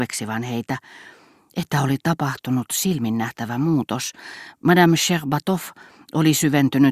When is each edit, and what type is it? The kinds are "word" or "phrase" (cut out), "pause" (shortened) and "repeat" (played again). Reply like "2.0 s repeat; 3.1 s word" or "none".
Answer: none